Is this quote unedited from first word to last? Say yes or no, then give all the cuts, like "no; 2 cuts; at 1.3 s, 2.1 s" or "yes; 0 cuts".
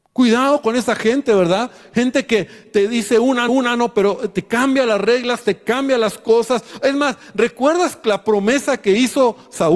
no; 1 cut; at 3.5 s